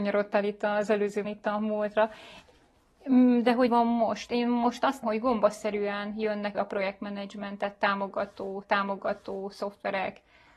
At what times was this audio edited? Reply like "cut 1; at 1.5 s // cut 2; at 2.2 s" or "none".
cut 1; at 1.2 s // cut 2; at 3.7 s // cut 3; at 5.0 s // cut 4; at 6.5 s // cut 5; at 8.6 s